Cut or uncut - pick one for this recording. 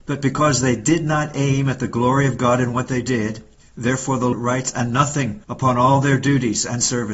cut